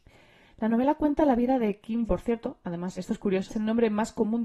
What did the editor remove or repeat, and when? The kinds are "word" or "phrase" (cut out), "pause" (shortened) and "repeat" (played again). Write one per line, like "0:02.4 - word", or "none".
0:02.1 - phrase
0:03.0 - word
0:03.5 - word